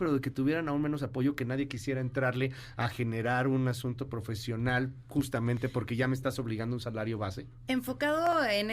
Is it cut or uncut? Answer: uncut